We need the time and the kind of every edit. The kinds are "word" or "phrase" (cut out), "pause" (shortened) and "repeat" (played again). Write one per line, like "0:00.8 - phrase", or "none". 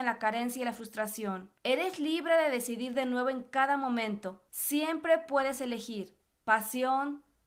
0:01.6 - pause
0:04.5 - pause